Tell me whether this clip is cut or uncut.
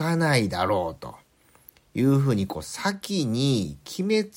uncut